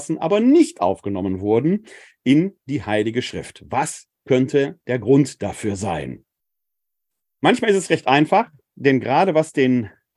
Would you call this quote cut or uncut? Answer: uncut